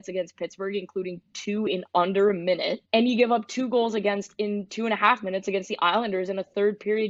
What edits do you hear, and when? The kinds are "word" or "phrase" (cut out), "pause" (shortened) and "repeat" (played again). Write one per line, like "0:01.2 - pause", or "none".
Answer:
0:02.8 - pause